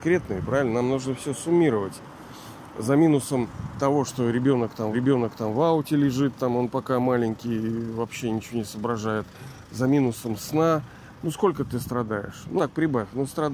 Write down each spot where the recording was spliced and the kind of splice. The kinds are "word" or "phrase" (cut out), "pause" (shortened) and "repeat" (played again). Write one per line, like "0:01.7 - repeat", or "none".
0:04.9 - repeat
0:12.6 - word